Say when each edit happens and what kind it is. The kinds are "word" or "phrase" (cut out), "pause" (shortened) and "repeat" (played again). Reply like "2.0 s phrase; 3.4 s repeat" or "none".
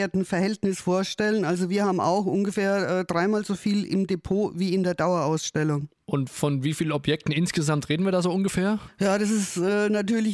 6.0 s pause